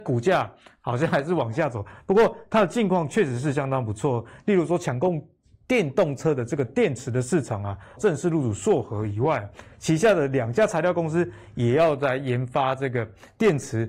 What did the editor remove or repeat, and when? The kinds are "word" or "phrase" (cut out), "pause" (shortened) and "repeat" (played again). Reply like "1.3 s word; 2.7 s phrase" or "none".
8.0 s word